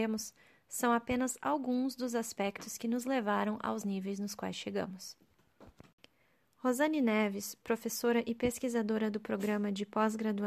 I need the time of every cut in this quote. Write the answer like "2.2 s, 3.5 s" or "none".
none